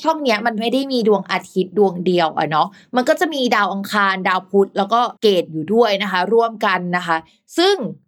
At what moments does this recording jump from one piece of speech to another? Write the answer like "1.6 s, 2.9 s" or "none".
5.2 s